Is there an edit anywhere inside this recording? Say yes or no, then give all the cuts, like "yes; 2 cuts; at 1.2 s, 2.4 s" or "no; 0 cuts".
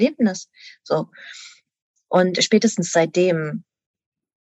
no; 0 cuts